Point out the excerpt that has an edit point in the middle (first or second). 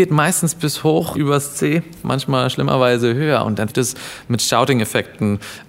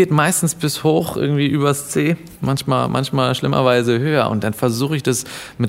first